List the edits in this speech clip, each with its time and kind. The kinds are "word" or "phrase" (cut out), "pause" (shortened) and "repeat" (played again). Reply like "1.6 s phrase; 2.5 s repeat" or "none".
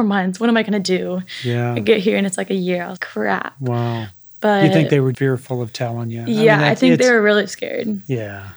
3.0 s word; 5.1 s word